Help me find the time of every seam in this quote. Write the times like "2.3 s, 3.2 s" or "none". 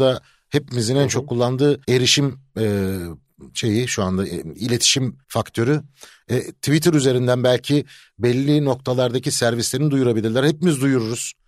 1.8 s, 3.5 s, 5.2 s